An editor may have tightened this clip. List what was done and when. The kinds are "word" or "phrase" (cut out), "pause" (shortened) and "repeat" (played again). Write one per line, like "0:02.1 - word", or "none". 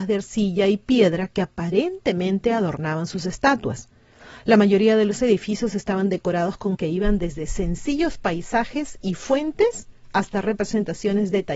0:06.7 - word